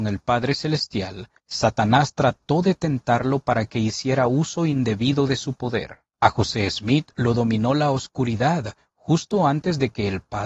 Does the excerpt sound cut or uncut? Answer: cut